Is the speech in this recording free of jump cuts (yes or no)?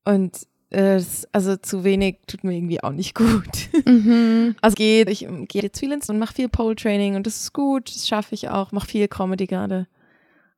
no